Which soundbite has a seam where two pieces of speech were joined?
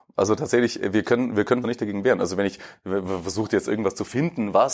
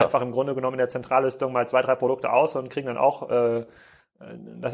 first; 1 cut; at 1.6 s

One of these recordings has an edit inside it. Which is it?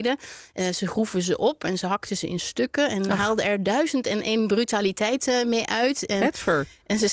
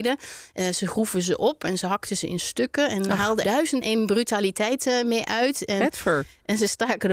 second; 2 cuts; at 3.4 s, 3.8 s

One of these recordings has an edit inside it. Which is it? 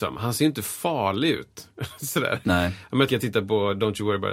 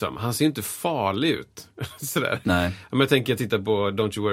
first; 1 cut; at 3.1 s

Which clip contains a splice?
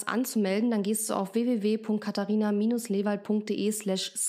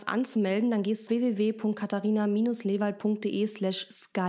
second; 1 cut; at 1.1 s

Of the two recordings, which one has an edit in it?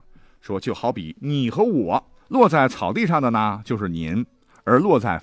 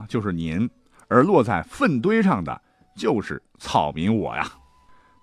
first; 1 cut; at 2.2 s

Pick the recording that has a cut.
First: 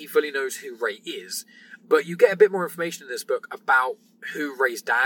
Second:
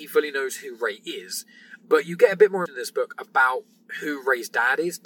second; 1 cut; at 2.7 s

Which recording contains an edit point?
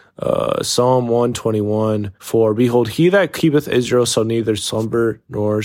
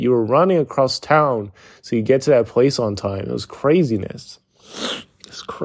first; 1 cut; at 2.2 s

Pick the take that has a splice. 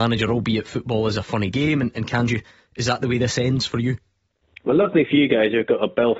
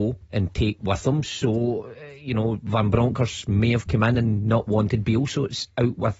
first; 1 cut; at 2.3 s

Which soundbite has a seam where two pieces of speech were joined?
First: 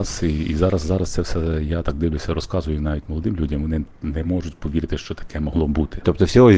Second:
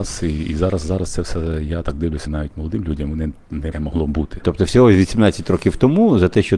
second; 2 cuts; at 2.3 s, 3.7 s

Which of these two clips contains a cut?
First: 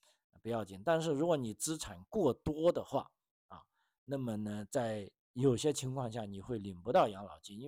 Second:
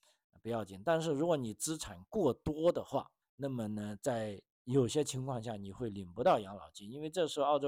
second; 1 cut; at 3.2 s

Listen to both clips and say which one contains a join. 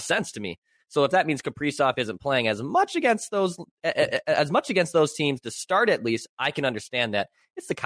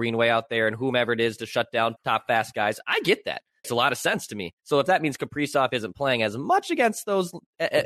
second; 3 cuts; at 2.0 s, 3.6 s, 4.6 s

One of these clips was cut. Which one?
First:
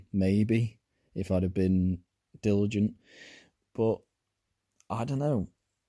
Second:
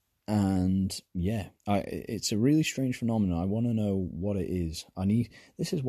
second; 1 cut; at 1.6 s

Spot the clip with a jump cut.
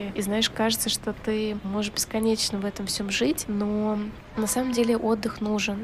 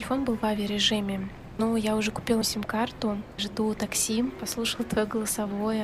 second; 1 cut; at 2.4 s

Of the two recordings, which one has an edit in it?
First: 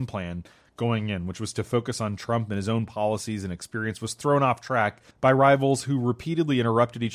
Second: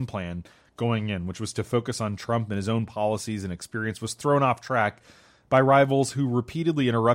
first; 1 cut; at 5.1 s

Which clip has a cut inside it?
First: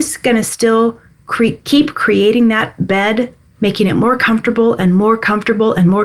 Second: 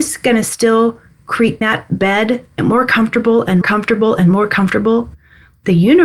second; 3 cuts; at 1.6 s, 2.6 s, 3.6 s

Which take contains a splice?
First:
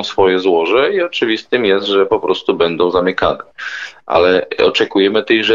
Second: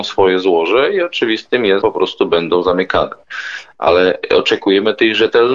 second; 1 cut; at 1.8 s

